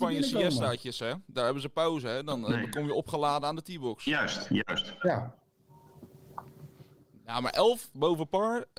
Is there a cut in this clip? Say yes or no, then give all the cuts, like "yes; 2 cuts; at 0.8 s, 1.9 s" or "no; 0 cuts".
no; 0 cuts